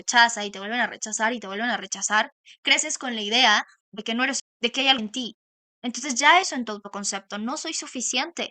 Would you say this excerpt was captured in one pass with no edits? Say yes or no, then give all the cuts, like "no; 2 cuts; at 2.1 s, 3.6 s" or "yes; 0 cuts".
no; 3 cuts; at 4.4 s, 5.0 s, 6.4 s